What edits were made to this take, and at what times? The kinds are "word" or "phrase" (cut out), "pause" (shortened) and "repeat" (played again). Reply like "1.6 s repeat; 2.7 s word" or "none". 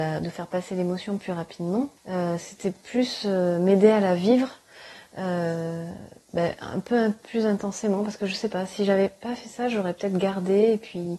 2.0 s pause